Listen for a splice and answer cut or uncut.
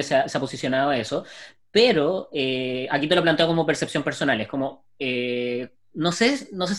uncut